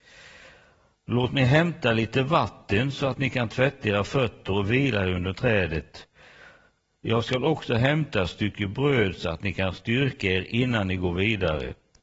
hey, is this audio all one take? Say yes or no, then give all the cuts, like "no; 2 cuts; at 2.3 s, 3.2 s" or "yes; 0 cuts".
yes; 0 cuts